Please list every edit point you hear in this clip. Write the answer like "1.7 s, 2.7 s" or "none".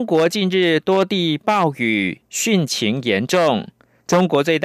none